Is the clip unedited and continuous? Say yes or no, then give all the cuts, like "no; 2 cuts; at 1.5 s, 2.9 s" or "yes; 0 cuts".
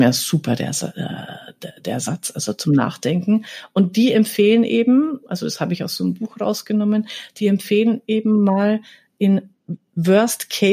yes; 0 cuts